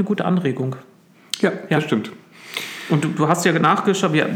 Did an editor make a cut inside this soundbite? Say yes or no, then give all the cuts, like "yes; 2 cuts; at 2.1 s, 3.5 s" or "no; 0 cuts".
no; 0 cuts